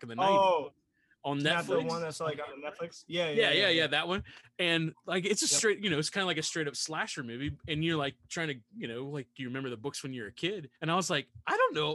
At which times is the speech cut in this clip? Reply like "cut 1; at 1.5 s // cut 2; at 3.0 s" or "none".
cut 1; at 10.8 s